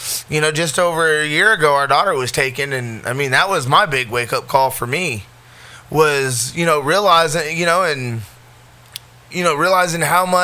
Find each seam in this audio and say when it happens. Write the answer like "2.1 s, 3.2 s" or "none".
none